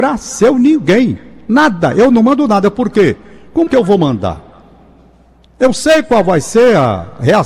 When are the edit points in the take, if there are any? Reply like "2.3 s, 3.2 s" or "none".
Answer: 3.7 s